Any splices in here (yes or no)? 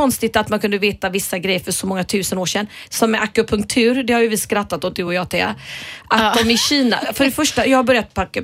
no